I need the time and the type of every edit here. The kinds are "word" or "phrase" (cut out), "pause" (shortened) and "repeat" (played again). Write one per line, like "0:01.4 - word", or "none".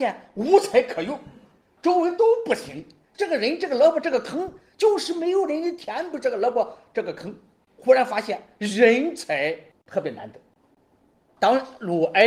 none